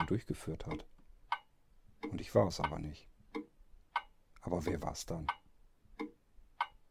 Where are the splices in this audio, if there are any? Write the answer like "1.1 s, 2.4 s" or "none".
none